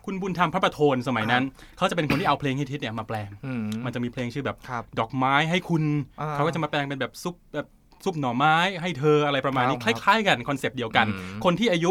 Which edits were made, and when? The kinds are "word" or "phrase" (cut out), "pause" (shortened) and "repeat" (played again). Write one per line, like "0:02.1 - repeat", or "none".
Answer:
none